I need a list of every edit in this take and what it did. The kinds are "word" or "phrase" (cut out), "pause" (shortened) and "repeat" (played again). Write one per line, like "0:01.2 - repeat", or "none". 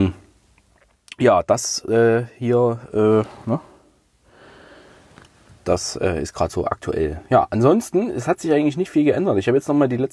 none